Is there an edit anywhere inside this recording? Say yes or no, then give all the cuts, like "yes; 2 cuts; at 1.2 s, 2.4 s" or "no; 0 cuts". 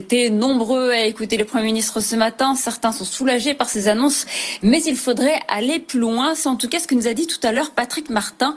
no; 0 cuts